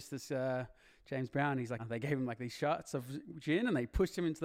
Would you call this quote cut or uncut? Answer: cut